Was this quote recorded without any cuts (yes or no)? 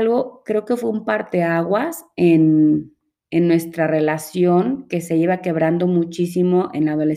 yes